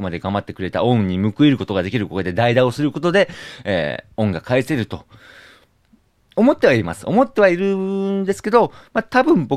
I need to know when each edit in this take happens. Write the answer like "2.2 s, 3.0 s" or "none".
none